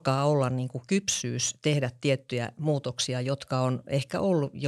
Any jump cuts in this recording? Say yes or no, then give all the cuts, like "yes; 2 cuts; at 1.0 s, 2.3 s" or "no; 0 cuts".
no; 0 cuts